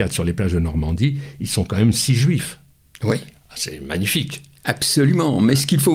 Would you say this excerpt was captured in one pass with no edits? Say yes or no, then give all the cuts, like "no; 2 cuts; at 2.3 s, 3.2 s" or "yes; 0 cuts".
yes; 0 cuts